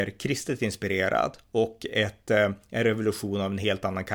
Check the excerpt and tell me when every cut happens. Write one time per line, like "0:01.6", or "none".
none